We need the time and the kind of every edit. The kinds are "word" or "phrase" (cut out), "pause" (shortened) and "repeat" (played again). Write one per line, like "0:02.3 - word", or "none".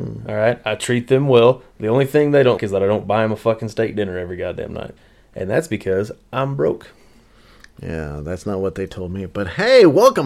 0:02.6 - word